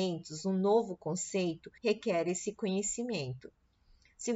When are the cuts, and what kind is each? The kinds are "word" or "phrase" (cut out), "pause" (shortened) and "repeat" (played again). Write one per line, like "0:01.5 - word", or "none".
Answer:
0:01.8 - pause